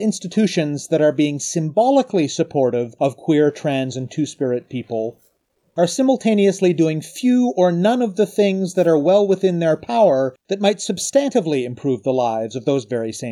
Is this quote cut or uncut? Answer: uncut